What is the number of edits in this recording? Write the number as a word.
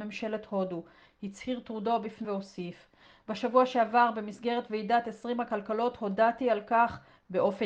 one